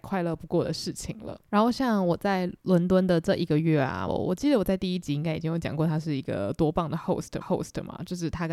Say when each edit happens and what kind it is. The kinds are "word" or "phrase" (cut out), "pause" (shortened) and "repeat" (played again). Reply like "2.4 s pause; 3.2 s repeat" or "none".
1.4 s pause; 4.1 s phrase; 7.4 s repeat